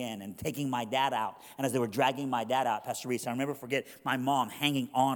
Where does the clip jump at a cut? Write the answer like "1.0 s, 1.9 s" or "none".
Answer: none